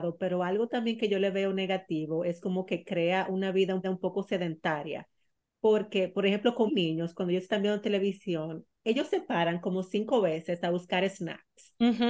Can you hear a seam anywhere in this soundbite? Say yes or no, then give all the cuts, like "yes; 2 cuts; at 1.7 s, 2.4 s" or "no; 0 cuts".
yes; 2 cuts; at 3.8 s, 6.7 s